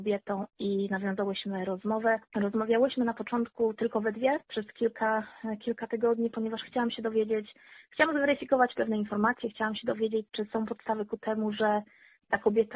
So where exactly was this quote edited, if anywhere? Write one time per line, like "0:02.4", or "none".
0:02.3
0:04.4